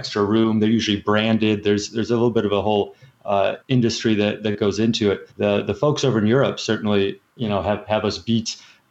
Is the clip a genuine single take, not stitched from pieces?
no; 3 cuts; at 3.6 s, 5.3 s, 7.3 s

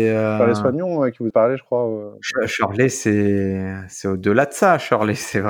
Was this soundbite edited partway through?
yes; 1 cut; at 1.3 s

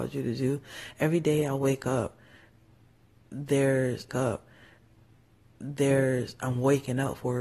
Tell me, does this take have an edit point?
yes; 1 cut; at 4.1 s

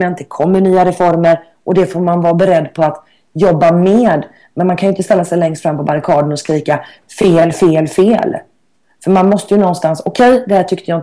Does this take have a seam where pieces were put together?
no; 0 cuts

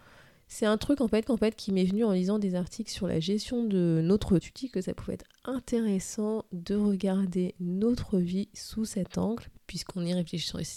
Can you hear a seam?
yes; 3 cuts; at 1.3 s, 4.4 s, 9.6 s

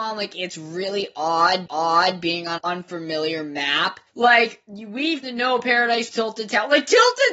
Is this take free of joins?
no; 5 cuts; at 1.7 s, 2.6 s, 4.1 s, 5.2 s, 6.1 s

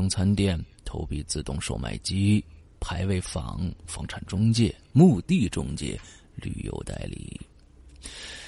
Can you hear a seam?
no; 0 cuts

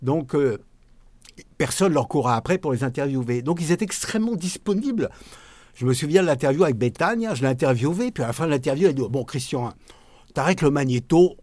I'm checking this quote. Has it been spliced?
no; 0 cuts

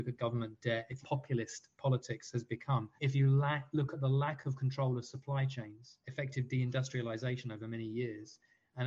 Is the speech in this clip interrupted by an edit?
yes; 2 cuts; at 1.0 s, 3.0 s

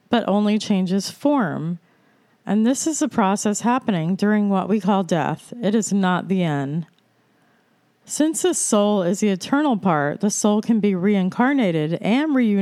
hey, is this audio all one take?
yes; 0 cuts

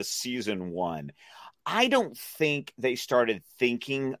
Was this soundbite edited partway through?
no; 0 cuts

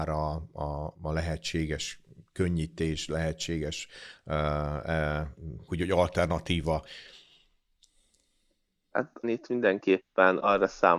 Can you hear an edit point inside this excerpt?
yes; 3 cuts; at 0.9 s, 5.7 s, 9.2 s

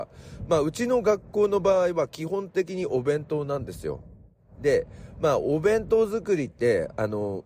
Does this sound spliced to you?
no; 0 cuts

